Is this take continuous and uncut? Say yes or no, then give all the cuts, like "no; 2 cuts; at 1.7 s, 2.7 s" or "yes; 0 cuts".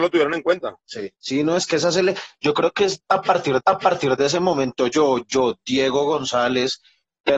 no; 2 cuts; at 1.2 s, 3.6 s